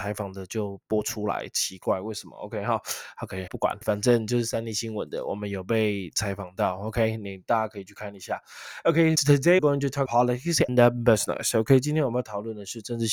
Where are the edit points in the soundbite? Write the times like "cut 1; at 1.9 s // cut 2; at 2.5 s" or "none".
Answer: cut 1; at 3.5 s // cut 2; at 3.8 s // cut 3; at 9.2 s // cut 4; at 9.6 s // cut 5; at 10.1 s // cut 6; at 10.7 s